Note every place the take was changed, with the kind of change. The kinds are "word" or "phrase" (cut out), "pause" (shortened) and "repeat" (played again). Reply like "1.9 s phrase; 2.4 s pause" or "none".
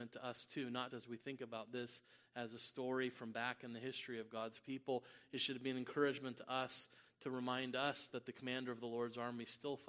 0.9 s word